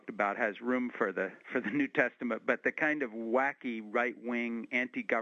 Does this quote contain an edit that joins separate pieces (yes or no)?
yes